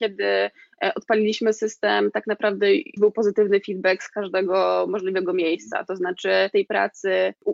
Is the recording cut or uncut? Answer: cut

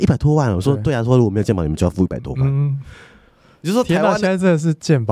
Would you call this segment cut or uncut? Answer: uncut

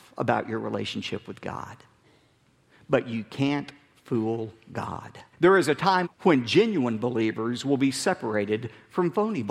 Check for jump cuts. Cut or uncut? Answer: cut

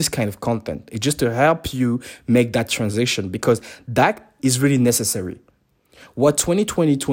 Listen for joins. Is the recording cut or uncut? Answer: cut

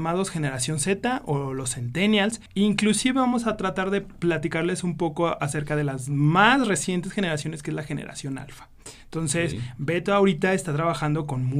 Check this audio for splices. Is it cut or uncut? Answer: cut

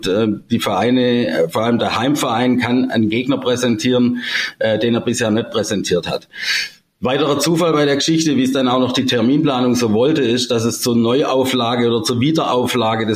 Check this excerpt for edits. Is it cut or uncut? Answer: uncut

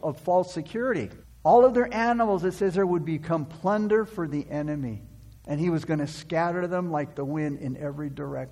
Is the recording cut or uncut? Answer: cut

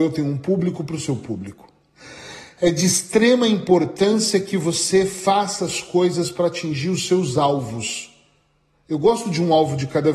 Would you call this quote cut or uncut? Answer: uncut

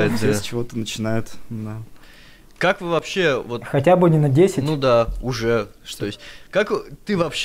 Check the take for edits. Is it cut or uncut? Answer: uncut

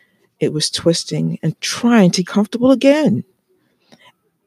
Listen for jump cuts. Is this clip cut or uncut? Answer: cut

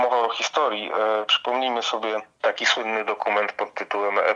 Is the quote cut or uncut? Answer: uncut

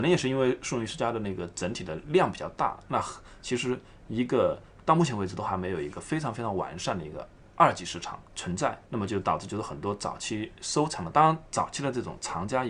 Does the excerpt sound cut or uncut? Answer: cut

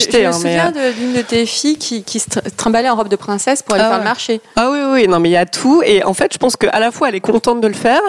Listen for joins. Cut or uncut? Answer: uncut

